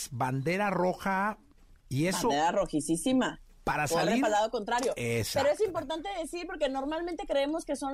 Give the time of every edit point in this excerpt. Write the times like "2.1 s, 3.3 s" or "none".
1.7 s